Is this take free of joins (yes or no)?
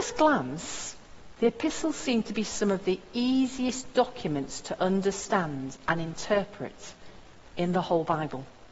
yes